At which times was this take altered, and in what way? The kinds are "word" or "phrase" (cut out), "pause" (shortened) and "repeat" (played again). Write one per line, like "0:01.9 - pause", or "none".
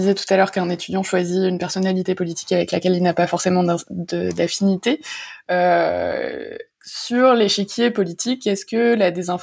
none